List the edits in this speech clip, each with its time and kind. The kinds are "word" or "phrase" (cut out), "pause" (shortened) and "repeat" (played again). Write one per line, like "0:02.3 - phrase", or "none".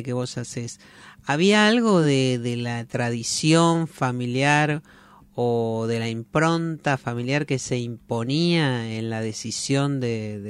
none